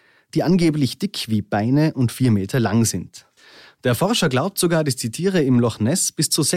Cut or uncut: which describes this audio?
uncut